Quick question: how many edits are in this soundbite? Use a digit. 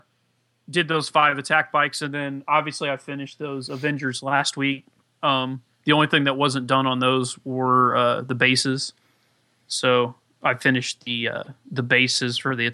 0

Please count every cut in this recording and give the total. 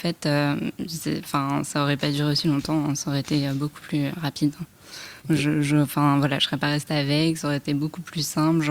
2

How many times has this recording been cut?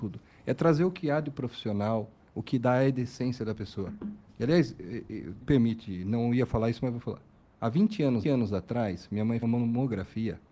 4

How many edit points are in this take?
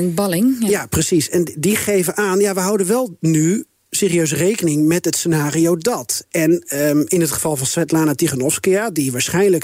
0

